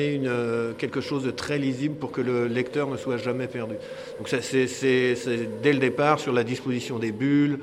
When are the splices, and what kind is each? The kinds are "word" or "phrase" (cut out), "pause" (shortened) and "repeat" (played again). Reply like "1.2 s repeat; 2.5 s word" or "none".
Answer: none